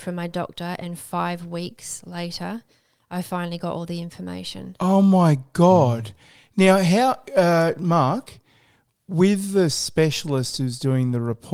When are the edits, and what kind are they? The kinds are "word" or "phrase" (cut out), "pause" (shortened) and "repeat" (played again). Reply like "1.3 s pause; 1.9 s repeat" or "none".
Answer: none